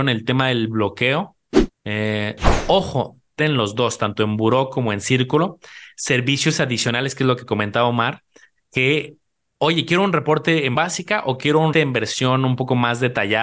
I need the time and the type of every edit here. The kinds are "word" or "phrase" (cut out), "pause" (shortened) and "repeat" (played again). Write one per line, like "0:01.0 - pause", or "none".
0:01.7 - pause
0:03.4 - phrase
0:10.7 - word
0:11.7 - word

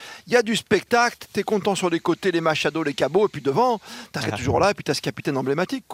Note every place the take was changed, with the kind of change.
0:04.2 - word

